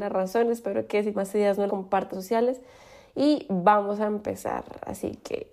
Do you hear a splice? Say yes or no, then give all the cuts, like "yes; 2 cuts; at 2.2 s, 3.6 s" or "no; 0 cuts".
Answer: yes; 3 cuts; at 1.1 s, 1.7 s, 2.1 s